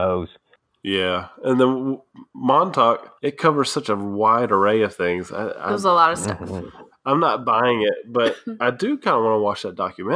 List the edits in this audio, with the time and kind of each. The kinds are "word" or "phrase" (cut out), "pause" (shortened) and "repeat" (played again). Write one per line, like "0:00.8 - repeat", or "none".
0:03.2 - pause